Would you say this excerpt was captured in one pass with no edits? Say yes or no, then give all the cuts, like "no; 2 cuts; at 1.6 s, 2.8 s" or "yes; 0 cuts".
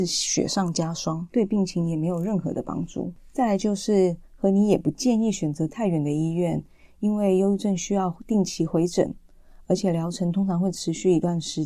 yes; 0 cuts